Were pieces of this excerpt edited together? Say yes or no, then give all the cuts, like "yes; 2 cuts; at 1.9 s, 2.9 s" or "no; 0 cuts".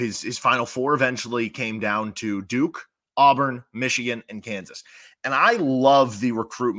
no; 0 cuts